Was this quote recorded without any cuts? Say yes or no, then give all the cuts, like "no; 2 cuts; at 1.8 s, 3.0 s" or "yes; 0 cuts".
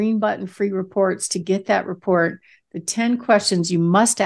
yes; 0 cuts